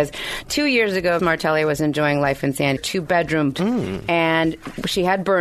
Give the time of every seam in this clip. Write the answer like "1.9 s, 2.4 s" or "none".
1.2 s, 2.8 s, 3.5 s